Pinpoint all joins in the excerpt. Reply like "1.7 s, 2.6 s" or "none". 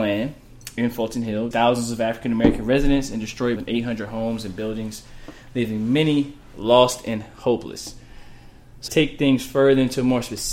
1.5 s, 3.6 s, 8.9 s

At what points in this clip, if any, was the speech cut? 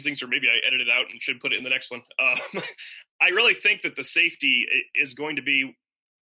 none

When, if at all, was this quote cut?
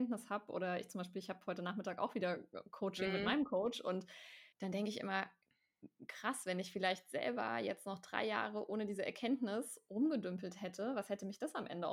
4.5 s

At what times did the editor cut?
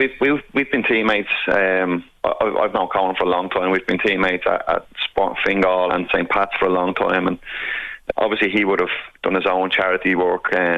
5.9 s, 8.1 s

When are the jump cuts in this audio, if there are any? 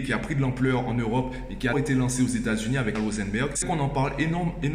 1.7 s, 2.9 s, 3.6 s

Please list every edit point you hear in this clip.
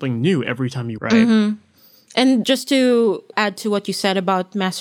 1.0 s, 2.4 s, 3.3 s

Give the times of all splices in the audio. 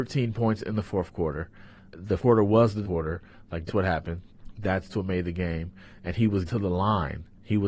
2.2 s, 2.8 s, 3.7 s, 4.9 s, 6.5 s

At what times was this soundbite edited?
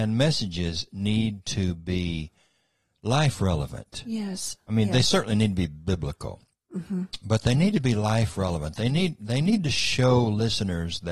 none

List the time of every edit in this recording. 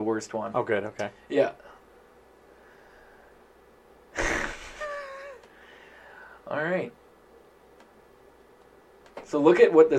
none

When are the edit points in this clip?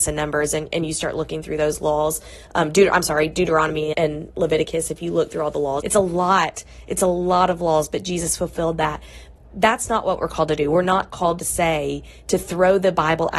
3.9 s, 5.8 s

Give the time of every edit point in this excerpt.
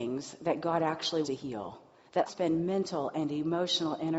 1.2 s, 2.3 s

